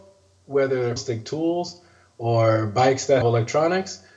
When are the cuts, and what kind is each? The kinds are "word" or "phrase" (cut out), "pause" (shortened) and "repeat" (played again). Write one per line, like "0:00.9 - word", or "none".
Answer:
0:01.0 - word
0:03.2 - word